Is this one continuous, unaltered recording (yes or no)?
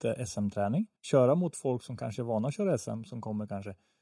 no